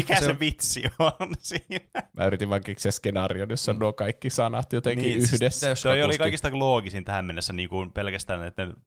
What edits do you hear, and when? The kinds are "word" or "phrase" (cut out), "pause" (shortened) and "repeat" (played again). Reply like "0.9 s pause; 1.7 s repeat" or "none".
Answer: 5.8 s word